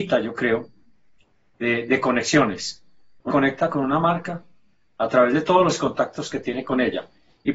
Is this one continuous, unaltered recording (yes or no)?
no